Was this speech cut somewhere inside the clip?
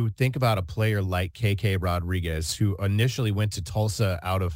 no; 0 cuts

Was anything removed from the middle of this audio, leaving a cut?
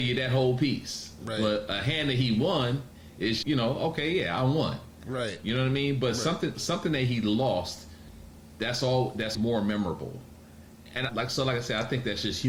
yes; 4 cuts; at 3.4 s, 6.5 s, 9.3 s, 11.1 s

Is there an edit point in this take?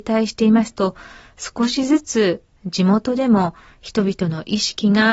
no; 0 cuts

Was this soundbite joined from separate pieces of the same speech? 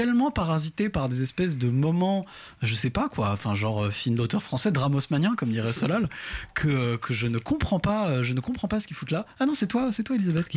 no; 0 cuts

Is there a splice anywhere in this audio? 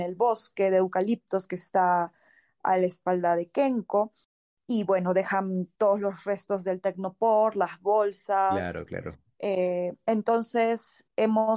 no; 0 cuts

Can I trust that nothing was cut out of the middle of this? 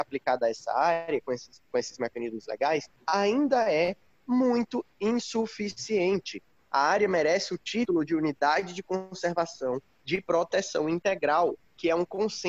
yes; 0 cuts

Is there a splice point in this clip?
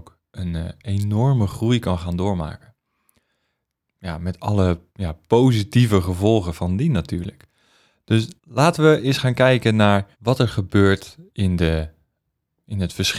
yes; 3 cuts; at 4.9 s, 8.4 s, 10.1 s

